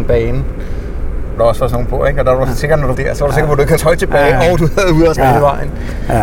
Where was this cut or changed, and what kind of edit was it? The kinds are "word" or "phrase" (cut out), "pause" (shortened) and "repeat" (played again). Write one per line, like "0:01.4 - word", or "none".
0:01.4 - word
0:02.9 - word
0:03.8 - word
0:05.2 - word